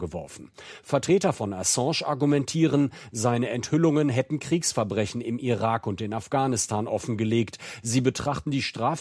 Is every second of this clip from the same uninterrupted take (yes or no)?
yes